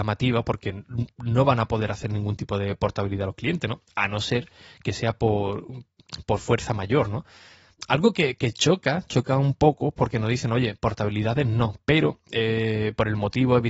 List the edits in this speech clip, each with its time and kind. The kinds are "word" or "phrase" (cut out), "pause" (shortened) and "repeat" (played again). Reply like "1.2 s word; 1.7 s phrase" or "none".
none